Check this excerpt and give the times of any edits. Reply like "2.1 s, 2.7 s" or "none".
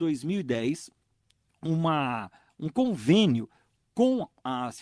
none